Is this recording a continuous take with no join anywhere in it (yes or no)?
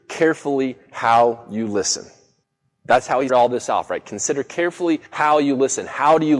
no